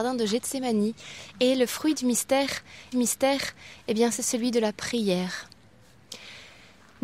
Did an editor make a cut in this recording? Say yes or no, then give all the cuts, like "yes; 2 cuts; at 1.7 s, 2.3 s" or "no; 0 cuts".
yes; 1 cut; at 2.9 s